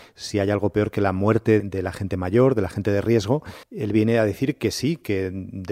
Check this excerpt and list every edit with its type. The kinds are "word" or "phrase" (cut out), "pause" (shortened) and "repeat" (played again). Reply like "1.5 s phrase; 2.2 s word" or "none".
1.6 s word; 3.6 s pause